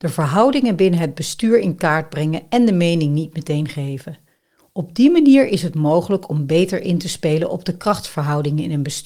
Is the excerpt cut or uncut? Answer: uncut